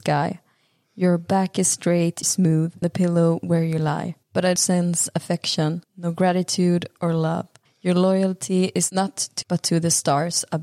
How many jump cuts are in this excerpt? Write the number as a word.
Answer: seven